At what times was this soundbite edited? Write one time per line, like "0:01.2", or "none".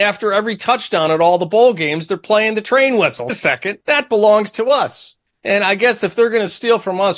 0:03.3
0:03.8
0:05.3